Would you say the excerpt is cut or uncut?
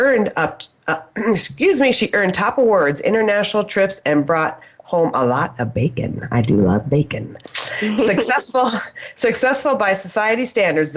uncut